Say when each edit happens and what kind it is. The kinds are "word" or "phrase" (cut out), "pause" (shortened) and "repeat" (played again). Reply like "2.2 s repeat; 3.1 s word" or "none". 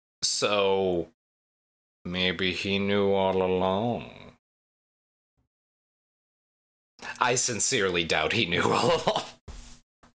none